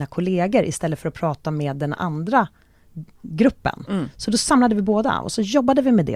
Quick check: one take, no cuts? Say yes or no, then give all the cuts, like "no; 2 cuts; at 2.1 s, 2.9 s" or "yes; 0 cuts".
yes; 0 cuts